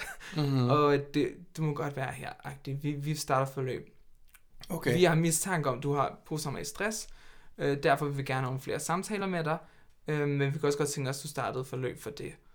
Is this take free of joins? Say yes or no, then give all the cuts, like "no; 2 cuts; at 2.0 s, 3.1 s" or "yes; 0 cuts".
yes; 0 cuts